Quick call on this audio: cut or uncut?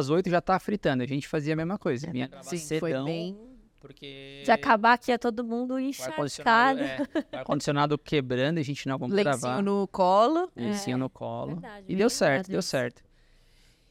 uncut